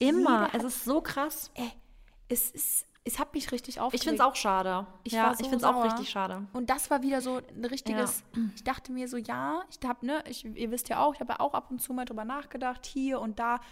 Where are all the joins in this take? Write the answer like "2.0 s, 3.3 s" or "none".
none